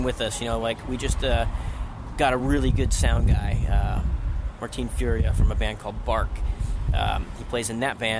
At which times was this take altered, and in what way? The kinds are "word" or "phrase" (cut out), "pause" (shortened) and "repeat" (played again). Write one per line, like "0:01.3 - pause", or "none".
none